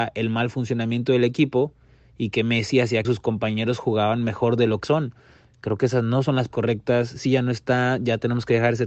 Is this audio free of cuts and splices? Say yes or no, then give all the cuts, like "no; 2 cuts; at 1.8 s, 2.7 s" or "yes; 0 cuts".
no; 4 cuts; at 3.0 s, 4.8 s, 6.5 s, 7.2 s